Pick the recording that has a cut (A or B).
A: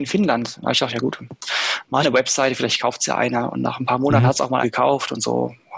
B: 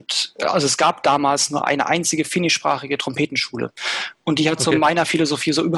A